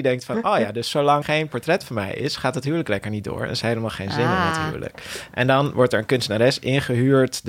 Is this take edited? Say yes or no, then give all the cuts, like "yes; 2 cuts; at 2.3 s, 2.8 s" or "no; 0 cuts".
yes; 2 cuts; at 1.2 s, 3.6 s